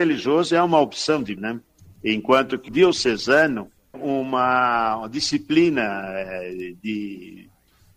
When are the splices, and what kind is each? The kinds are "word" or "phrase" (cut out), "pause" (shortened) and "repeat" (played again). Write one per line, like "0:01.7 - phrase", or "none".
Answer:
0:01.4 - word
0:02.7 - word
0:03.9 - word